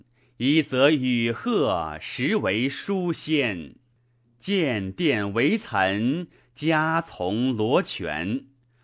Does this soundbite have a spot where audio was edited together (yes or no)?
no